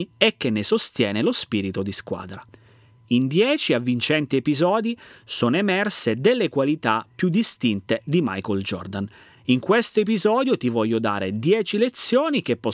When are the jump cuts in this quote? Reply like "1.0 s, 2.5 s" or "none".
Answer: none